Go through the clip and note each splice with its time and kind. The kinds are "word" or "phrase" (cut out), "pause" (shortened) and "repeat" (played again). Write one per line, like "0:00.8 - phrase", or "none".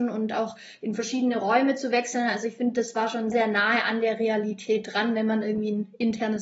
0:03.3 - word